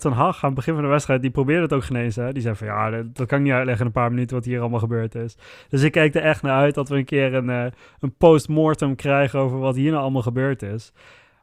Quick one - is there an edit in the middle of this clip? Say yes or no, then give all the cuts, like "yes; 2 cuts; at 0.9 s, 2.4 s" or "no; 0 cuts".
no; 0 cuts